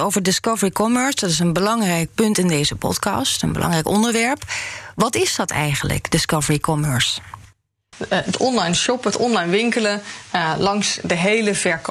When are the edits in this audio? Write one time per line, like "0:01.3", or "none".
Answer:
none

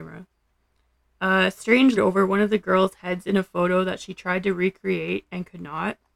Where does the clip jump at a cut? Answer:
0:02.0

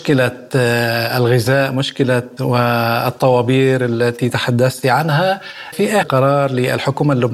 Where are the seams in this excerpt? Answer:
0:02.4
0:05.7
0:06.0

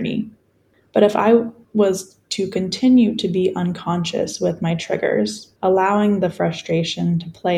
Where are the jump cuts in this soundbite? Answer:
0:05.6

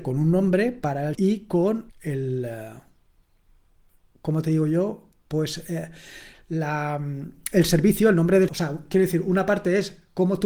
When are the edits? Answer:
0:01.1
0:01.9
0:08.5

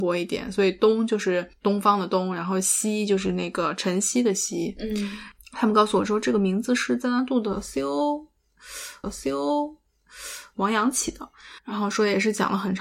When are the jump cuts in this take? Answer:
0:09.0
0:11.6

